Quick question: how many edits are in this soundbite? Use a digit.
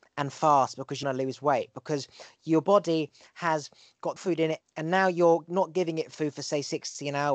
3